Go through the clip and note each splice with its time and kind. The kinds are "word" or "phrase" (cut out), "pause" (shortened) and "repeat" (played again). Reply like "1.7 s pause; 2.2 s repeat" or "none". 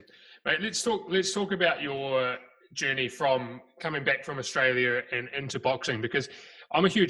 none

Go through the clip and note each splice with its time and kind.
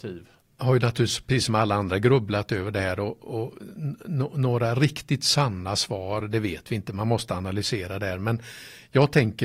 none

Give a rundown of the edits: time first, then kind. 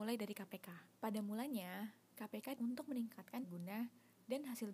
0.9 s pause; 2.5 s word; 3.4 s word

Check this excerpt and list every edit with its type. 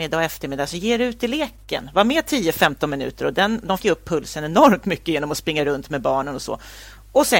3.8 s word

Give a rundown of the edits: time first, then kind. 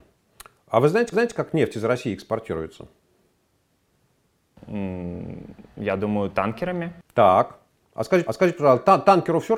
1.1 s repeat; 8.3 s repeat

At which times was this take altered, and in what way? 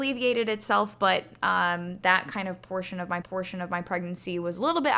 3.2 s repeat

